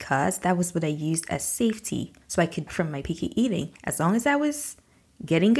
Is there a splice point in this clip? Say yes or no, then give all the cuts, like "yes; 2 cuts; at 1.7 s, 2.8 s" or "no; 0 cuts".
yes; 3 cuts; at 2.2 s, 2.7 s, 3.8 s